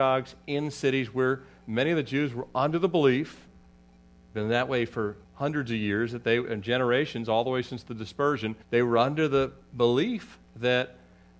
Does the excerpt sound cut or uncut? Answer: cut